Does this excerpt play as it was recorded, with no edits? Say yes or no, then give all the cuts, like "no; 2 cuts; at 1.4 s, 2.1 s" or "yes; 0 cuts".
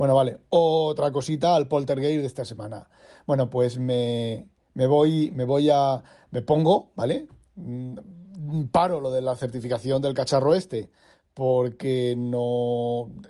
yes; 0 cuts